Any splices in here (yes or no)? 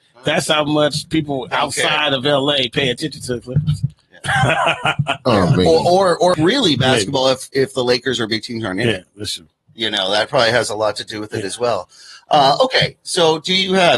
no